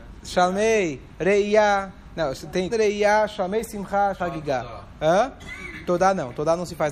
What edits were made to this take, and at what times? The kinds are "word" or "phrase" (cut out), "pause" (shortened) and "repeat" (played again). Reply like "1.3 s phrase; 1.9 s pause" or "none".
2.7 s word; 4.2 s word